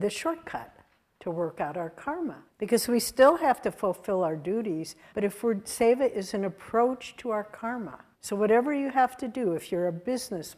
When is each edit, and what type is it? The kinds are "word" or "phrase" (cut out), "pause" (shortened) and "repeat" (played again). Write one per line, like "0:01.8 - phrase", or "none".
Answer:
0:02.5 - pause
0:05.1 - pause
0:08.1 - pause